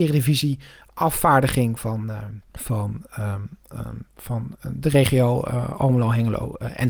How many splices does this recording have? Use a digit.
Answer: 1